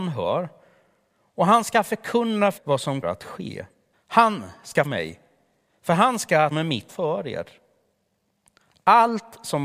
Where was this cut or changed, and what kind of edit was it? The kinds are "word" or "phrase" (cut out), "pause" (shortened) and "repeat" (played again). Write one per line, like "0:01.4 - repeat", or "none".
0:02.6 - word
0:03.0 - word
0:03.9 - pause
0:04.8 - word
0:06.5 - phrase
0:06.9 - phrase